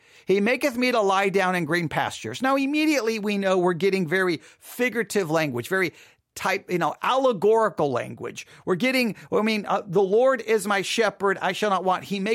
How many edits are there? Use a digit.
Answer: 0